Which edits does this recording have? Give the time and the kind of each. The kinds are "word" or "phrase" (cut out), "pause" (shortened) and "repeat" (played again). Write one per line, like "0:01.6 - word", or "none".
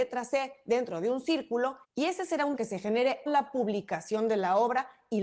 0:01.8 - pause
0:02.5 - word
0:03.3 - phrase